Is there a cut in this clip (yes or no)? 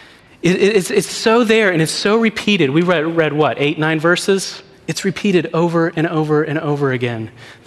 no